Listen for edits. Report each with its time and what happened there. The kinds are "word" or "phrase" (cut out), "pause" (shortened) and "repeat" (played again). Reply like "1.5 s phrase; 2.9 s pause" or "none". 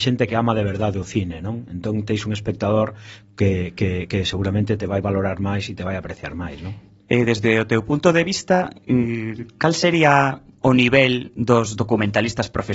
none